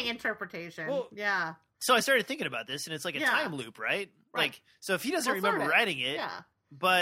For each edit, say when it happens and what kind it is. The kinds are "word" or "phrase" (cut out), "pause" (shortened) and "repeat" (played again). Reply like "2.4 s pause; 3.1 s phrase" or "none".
none